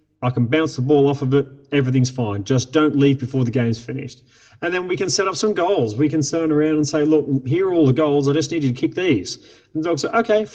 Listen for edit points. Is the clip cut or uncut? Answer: uncut